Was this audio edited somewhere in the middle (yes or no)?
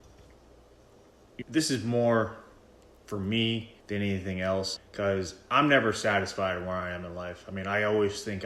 yes